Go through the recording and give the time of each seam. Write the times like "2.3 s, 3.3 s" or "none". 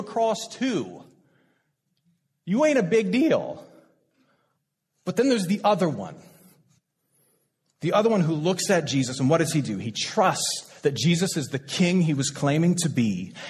none